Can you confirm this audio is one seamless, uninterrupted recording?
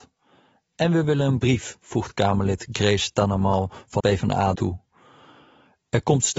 no; 2 cuts; at 4.0 s, 4.5 s

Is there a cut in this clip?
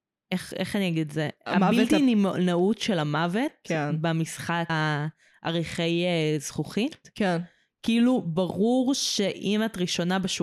yes; 1 cut; at 4.7 s

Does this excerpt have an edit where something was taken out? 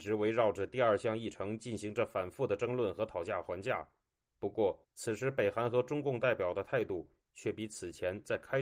yes; 1 cut; at 4.8 s

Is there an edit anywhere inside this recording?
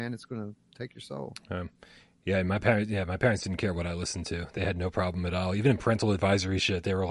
no; 0 cuts

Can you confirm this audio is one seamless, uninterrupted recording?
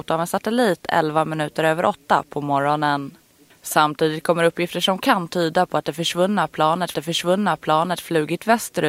no; 1 cut; at 6.9 s

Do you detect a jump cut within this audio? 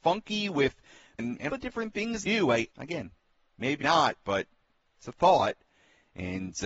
yes; 5 cuts; at 1.2 s, 1.5 s, 2.2 s, 2.7 s, 3.8 s

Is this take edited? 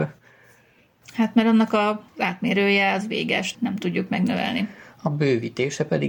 yes; 2 cuts; at 2.1 s, 3.5 s

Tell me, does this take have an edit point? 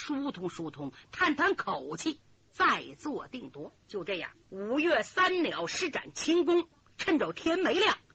yes; 2 cuts; at 3.8 s, 4.4 s

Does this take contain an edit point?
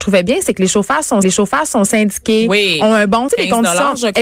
yes; 2 cuts; at 1.2 s, 3.3 s

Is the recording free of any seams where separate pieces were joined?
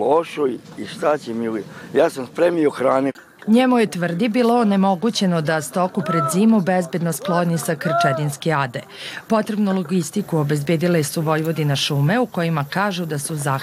yes; 0 cuts

